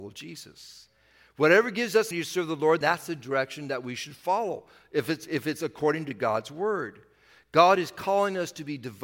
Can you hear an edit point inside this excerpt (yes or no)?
yes